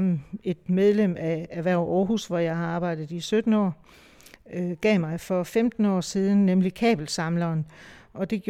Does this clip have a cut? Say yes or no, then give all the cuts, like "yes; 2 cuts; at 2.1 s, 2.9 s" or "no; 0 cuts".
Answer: no; 0 cuts